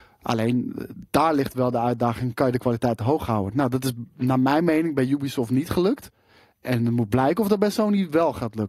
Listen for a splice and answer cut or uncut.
cut